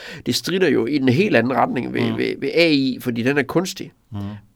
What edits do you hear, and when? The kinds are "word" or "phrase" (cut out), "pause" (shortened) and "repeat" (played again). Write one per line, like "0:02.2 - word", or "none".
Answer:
none